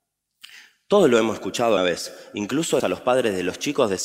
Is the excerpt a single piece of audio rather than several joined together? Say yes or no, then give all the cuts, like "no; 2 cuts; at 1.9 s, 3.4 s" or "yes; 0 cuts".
no; 2 cuts; at 1.8 s, 2.8 s